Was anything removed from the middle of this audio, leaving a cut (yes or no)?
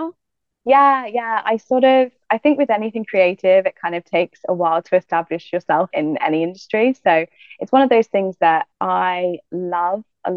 yes